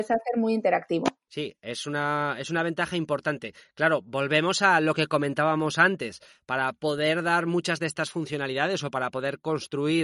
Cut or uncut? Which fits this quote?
uncut